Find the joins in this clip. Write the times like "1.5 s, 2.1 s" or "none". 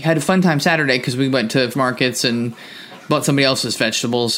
1.7 s